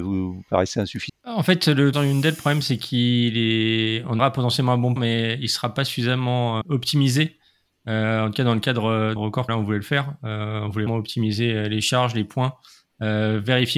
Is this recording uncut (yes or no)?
no